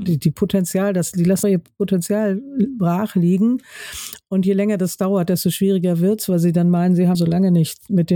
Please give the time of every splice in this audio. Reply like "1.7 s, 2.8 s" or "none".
1.4 s, 7.1 s